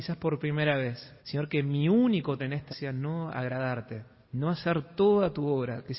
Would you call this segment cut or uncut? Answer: cut